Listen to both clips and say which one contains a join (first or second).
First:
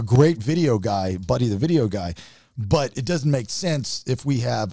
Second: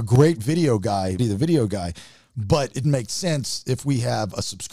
second